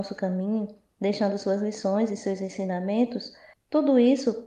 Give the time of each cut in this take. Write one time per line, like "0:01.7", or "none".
none